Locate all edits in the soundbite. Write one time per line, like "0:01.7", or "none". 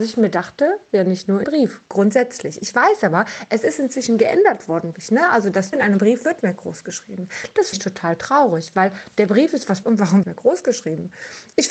0:01.4
0:04.9
0:05.7
0:06.4
0:07.7
0:09.8
0:10.2